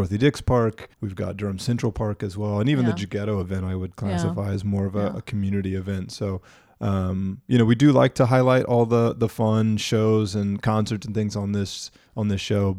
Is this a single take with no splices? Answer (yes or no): no